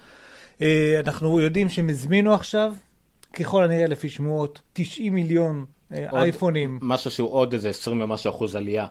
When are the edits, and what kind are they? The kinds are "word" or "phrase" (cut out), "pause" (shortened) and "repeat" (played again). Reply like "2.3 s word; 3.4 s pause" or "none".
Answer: 4.7 s pause